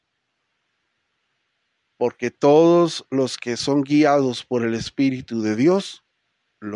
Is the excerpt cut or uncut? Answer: uncut